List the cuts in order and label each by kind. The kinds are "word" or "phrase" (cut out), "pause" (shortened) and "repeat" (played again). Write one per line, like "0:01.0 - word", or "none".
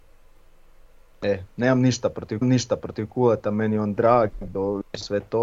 0:02.4 - repeat
0:04.5 - word